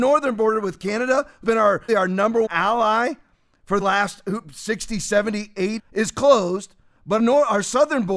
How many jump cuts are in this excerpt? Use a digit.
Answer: 6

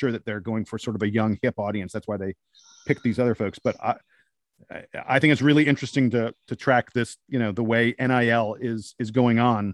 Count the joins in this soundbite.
1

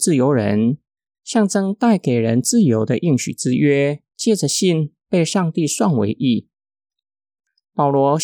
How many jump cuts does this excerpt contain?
1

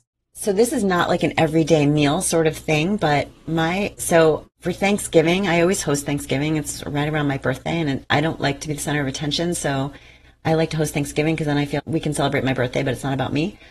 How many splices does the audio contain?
1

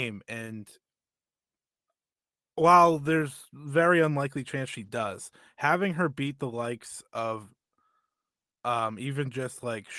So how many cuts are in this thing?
0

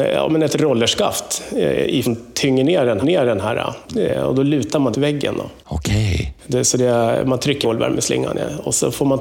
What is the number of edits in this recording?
5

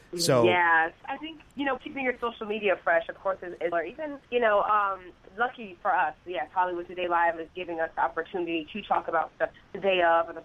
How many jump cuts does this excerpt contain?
5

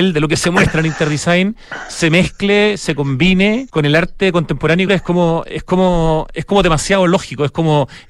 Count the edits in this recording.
2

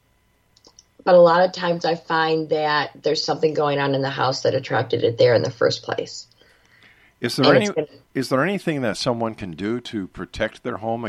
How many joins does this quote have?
0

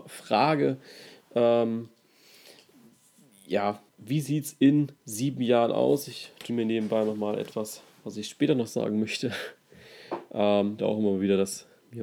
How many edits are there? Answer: 4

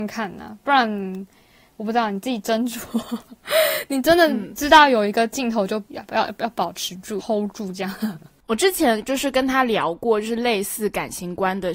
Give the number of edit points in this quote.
1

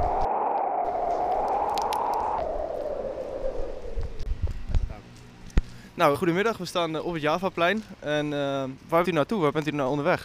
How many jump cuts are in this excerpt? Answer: 2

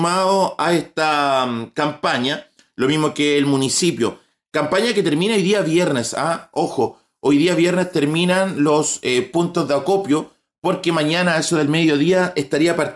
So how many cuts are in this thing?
0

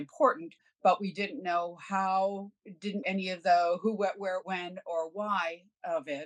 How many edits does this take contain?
1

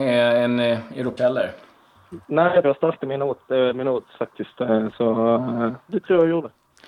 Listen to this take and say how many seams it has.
4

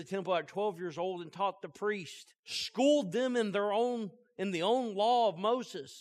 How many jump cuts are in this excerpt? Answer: 1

